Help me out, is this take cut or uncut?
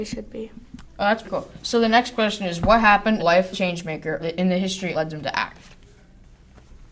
cut